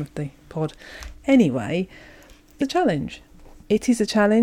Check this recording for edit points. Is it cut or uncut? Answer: cut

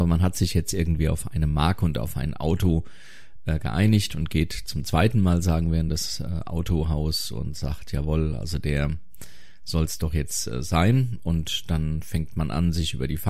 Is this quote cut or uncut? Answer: uncut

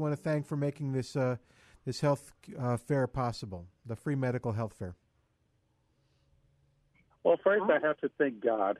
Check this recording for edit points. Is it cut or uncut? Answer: uncut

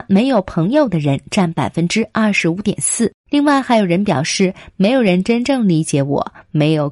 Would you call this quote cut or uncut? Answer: cut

